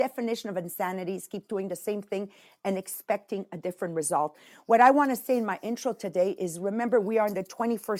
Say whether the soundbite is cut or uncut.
uncut